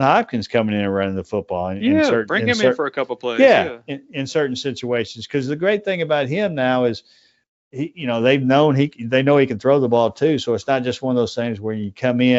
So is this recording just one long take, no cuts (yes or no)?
yes